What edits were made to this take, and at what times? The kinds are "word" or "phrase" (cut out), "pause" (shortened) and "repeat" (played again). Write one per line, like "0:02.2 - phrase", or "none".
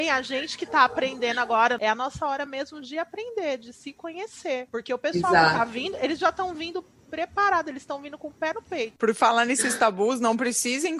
none